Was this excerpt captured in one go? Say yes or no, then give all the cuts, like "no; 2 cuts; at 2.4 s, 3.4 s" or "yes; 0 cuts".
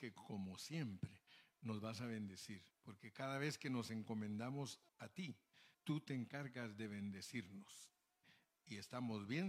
no; 3 cuts; at 2.7 s, 4.9 s, 5.7 s